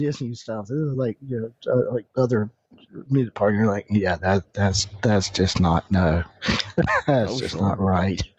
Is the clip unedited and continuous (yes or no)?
yes